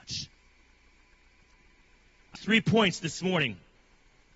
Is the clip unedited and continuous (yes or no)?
no